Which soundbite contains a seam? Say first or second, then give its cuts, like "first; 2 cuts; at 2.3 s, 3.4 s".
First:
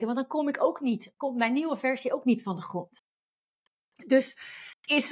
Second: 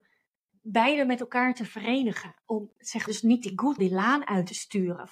second; 3 cuts; at 2.7 s, 3.1 s, 3.8 s